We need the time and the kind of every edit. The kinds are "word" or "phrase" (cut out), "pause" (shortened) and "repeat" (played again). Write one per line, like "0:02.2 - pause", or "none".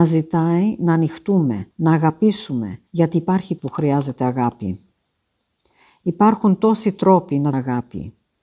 0:01.7 - pause
0:02.9 - pause
0:03.6 - phrase
0:07.5 - word